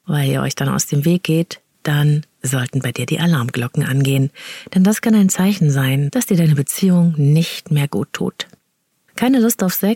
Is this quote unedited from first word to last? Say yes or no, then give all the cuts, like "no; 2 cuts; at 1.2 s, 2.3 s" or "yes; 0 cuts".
yes; 0 cuts